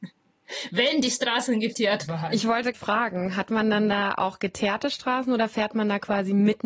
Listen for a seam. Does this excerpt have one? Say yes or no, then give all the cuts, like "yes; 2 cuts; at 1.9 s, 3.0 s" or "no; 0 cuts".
yes; 1 cut; at 2.7 s